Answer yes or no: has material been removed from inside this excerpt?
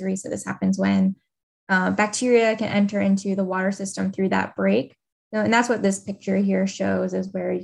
no